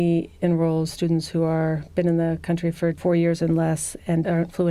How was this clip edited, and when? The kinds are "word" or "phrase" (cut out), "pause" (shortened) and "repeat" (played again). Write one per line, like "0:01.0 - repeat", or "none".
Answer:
none